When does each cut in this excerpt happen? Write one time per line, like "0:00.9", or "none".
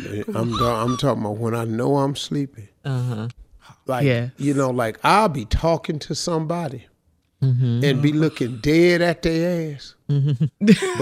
none